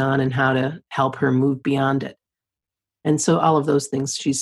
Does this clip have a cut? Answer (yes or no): no